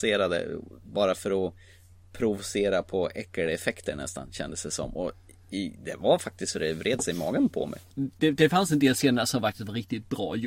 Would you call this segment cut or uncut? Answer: uncut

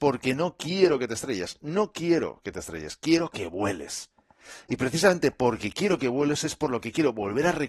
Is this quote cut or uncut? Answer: uncut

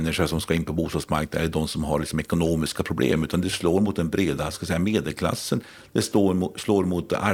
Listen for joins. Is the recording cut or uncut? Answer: uncut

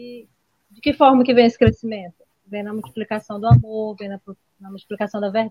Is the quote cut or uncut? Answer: uncut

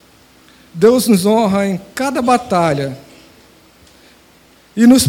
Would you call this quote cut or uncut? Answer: uncut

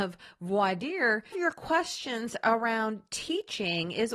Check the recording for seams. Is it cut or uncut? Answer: cut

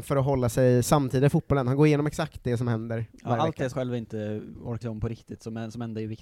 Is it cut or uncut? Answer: cut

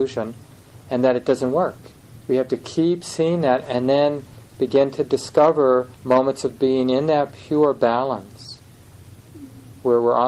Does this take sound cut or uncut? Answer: cut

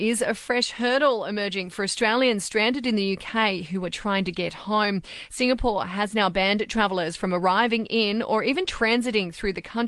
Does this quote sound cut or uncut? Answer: uncut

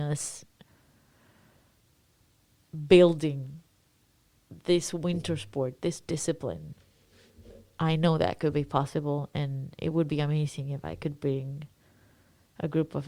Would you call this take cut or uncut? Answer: uncut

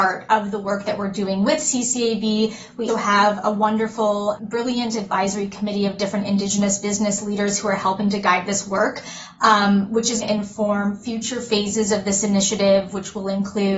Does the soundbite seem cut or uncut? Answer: cut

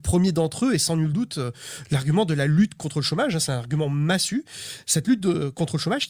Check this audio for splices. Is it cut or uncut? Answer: uncut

